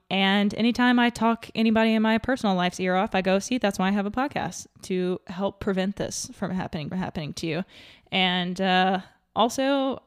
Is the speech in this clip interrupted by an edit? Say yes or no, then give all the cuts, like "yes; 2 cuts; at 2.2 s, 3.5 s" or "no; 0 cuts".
yes; 1 cut; at 6.9 s